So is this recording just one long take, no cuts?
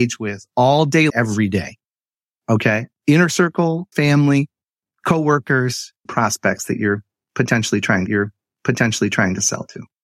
no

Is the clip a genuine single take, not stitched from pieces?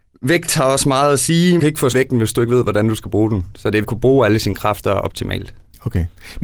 no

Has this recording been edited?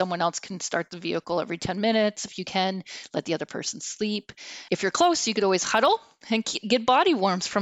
yes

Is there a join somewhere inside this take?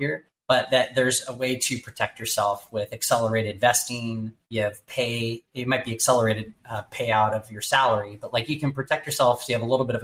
yes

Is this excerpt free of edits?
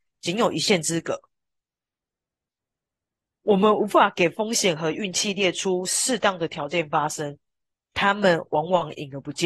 yes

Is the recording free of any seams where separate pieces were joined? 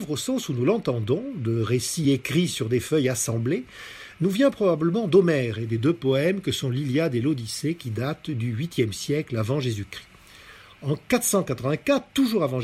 yes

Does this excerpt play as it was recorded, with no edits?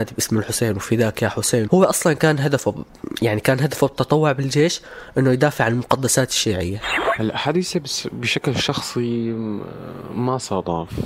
no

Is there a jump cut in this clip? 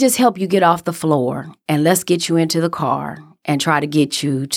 no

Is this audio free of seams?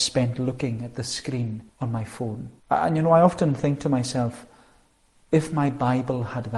no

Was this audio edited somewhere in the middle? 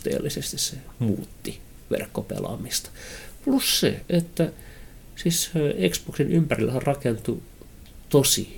no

